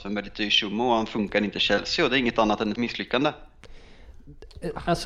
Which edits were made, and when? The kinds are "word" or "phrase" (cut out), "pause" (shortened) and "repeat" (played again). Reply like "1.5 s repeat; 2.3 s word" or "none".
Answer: 2.8 s word

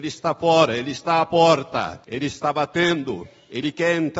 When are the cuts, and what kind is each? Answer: 2.0 s pause

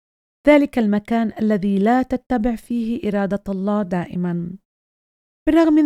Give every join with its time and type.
none

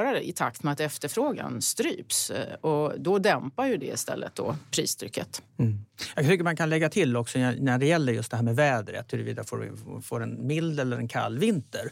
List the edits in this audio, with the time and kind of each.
none

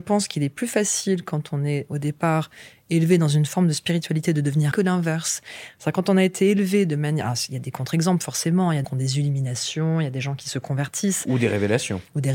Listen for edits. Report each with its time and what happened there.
4.7 s word; 8.8 s word

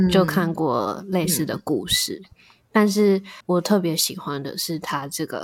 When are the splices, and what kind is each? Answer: 3.4 s pause

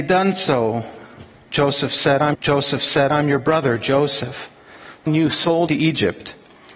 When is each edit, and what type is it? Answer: 2.3 s repeat; 5.1 s word; 5.7 s word

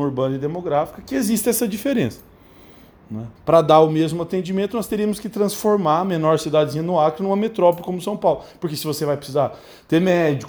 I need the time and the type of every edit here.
3.4 s pause

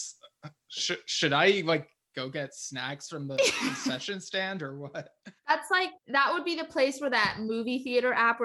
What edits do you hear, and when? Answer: 5.4 s pause; 6.0 s pause

